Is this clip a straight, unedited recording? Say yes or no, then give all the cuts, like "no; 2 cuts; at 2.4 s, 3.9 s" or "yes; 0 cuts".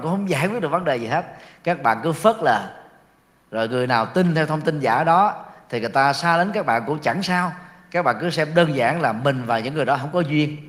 yes; 0 cuts